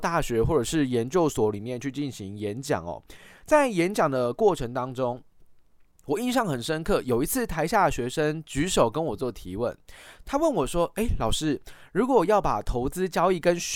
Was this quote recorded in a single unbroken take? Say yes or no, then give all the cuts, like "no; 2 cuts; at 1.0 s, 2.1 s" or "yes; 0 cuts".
yes; 0 cuts